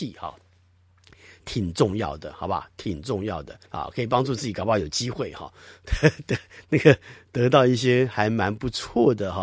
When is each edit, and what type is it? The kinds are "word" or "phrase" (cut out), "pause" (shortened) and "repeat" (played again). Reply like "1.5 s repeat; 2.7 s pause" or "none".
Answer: 3.7 s pause